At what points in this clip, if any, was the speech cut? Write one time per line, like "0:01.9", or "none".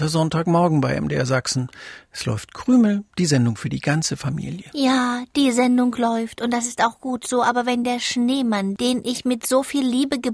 none